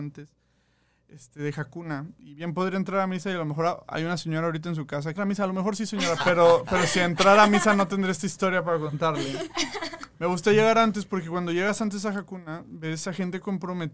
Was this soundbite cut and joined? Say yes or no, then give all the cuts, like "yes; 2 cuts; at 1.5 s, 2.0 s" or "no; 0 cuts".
yes; 2 cuts; at 5.2 s, 6.2 s